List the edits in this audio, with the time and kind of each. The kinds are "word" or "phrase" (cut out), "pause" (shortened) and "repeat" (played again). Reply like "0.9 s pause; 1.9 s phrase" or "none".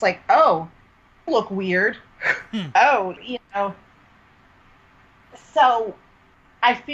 1.3 s word; 2.7 s word; 3.2 s word